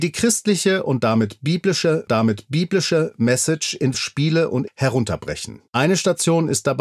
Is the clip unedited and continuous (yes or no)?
no